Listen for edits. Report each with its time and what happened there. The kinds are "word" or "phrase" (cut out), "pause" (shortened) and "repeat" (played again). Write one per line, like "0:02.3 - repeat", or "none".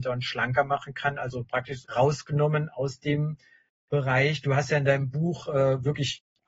0:01.8 - phrase